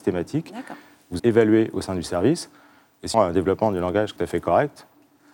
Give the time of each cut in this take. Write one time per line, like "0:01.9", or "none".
0:01.2
0:03.1
0:04.2